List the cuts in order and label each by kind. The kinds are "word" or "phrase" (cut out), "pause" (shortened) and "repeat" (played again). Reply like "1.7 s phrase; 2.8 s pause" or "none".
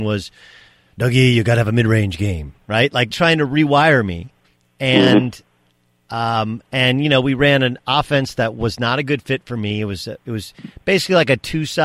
3.1 s word; 4.4 s pause